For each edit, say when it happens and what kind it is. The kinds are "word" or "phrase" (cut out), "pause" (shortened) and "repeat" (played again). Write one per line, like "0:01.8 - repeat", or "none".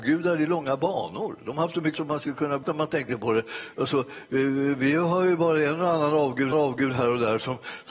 0:01.9 - word
0:02.6 - phrase
0:06.5 - repeat